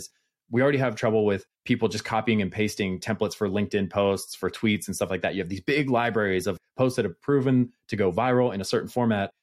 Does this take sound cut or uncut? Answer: cut